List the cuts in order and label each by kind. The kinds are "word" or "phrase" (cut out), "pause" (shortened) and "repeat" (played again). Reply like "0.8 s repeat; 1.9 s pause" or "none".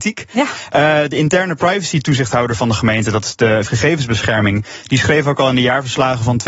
3.7 s word